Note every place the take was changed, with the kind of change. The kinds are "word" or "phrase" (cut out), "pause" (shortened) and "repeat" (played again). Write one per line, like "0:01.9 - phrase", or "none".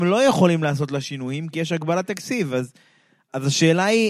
none